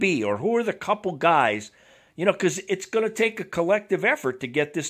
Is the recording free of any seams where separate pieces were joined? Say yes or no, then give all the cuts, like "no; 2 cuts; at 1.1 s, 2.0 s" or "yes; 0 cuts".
yes; 0 cuts